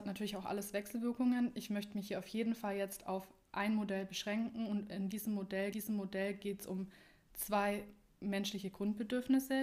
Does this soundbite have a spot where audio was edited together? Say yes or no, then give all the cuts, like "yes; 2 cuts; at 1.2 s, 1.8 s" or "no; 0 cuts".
yes; 1 cut; at 5.7 s